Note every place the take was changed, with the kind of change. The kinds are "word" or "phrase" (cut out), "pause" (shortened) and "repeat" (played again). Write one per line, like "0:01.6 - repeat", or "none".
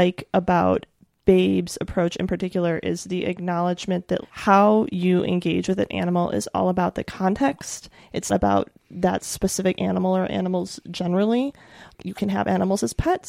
0:04.2 - word
0:08.3 - word